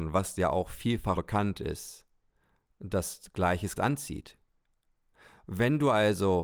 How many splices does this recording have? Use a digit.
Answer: 2